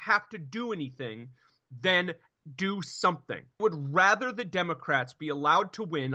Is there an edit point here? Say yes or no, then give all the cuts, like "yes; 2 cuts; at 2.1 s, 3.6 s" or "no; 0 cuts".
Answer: yes; 1 cut; at 3.6 s